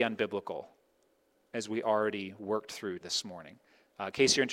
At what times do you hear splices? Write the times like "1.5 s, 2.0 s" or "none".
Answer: 3.0 s